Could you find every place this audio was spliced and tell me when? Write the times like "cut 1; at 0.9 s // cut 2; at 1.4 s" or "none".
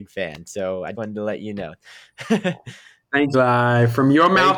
cut 1; at 0.9 s // cut 2; at 1.8 s // cut 3; at 3.3 s